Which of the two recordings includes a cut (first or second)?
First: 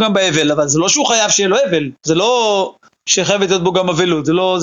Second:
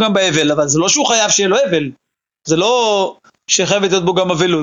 first